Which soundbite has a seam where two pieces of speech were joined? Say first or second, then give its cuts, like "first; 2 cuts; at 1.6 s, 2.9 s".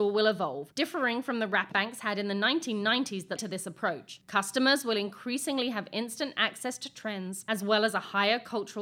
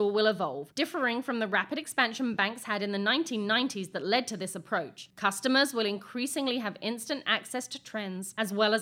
first; 2 cuts; at 1.7 s, 3.4 s